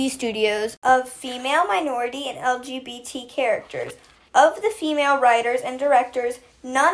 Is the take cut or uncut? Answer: uncut